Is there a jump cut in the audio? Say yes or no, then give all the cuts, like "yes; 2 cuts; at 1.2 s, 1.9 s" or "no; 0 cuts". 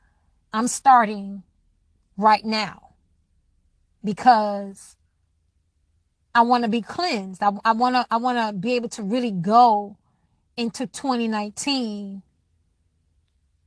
no; 0 cuts